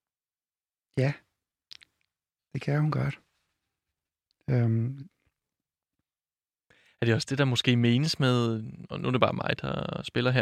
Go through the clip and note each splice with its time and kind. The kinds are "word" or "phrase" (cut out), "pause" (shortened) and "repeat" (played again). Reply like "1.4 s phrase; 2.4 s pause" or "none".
none